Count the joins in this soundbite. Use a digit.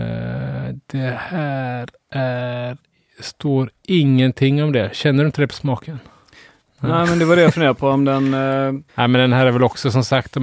1